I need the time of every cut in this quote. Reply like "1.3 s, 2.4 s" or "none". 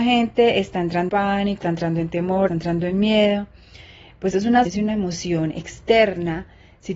1.1 s, 1.6 s, 2.5 s, 4.3 s, 4.7 s

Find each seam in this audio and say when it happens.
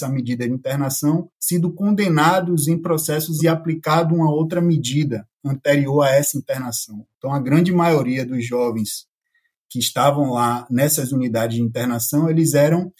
1.3 s, 3.4 s

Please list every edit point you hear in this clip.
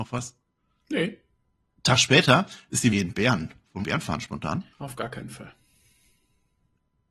1.6 s, 2.9 s, 3.8 s, 4.7 s

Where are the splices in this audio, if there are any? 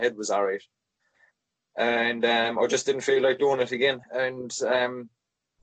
4.0 s

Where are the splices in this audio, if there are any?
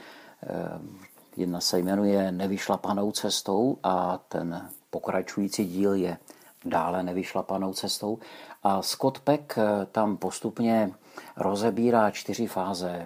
none

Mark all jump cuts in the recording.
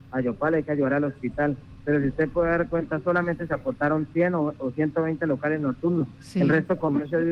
none

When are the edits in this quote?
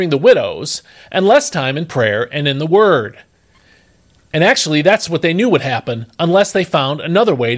none

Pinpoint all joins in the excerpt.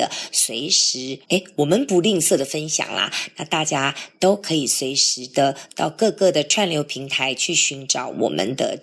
1.2 s

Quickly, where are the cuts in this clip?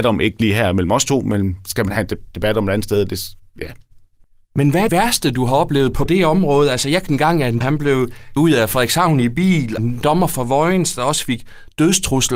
4.9 s, 6.1 s, 7.1 s, 7.6 s, 8.4 s, 9.8 s

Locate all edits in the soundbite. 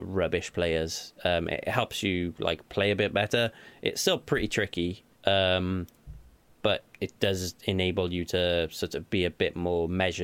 5.1 s, 6.9 s

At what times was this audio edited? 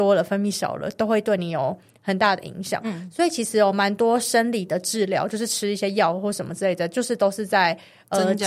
none

